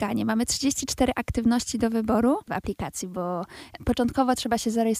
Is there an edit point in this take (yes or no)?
no